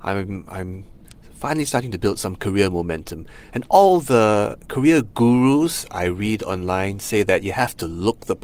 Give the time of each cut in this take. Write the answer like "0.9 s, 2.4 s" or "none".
none